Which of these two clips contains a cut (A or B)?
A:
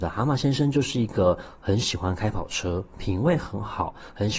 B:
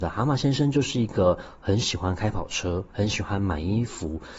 B